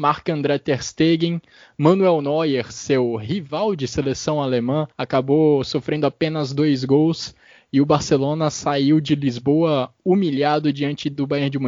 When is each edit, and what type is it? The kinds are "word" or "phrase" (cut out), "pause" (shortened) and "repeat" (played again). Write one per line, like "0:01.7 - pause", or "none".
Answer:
0:04.9 - pause